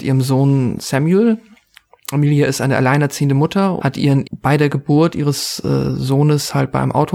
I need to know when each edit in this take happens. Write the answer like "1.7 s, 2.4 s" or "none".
3.8 s, 4.2 s